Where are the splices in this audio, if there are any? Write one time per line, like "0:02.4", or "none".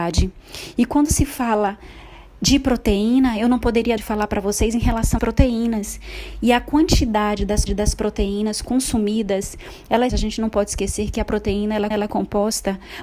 0:04.0
0:05.2
0:07.7
0:10.1
0:11.9